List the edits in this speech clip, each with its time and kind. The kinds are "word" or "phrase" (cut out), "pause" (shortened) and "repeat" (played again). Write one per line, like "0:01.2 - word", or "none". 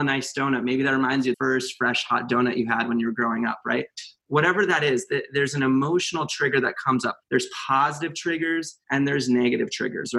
0:01.3 - word
0:04.2 - pause
0:07.2 - pause
0:08.8 - pause